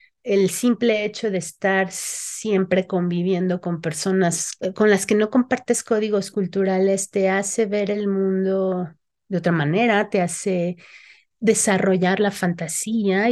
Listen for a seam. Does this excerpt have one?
no; 0 cuts

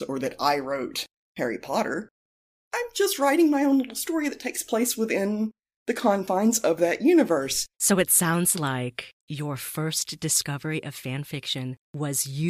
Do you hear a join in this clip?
yes; 1 cut; at 7.7 s

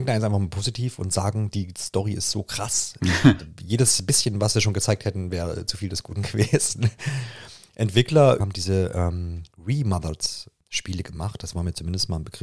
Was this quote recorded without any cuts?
no; 2 cuts; at 8.4 s, 9.5 s

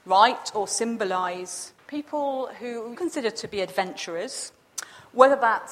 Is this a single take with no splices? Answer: no; 2 cuts; at 1.8 s, 2.9 s

